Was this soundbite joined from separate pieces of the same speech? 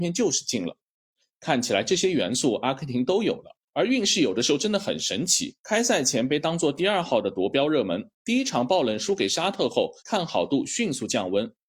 yes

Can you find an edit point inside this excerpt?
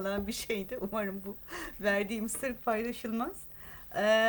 no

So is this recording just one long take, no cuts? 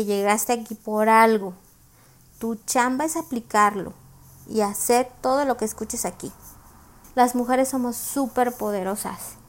yes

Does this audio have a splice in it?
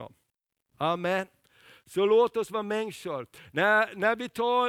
no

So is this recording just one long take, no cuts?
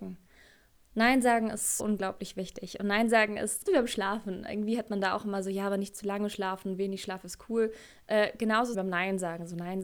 no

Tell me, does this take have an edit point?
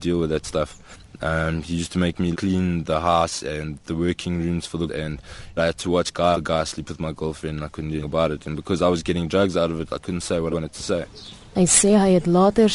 yes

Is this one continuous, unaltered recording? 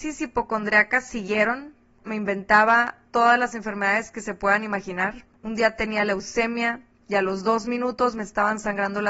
yes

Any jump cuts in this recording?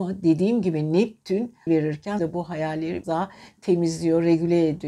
yes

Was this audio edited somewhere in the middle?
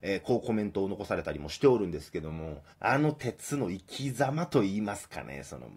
yes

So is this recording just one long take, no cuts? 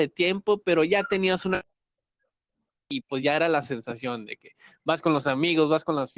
yes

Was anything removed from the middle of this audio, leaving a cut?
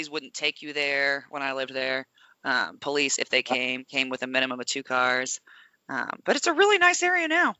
no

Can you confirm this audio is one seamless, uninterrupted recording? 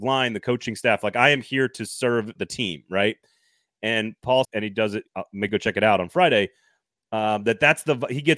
no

